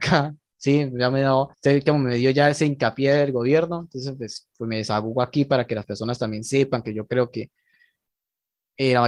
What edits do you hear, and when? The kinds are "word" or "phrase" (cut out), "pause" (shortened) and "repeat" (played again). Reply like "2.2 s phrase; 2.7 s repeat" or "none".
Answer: 1.5 s pause